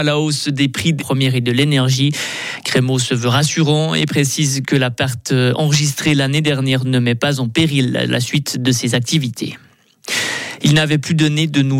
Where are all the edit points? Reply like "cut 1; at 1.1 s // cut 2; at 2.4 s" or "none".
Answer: cut 1; at 1.0 s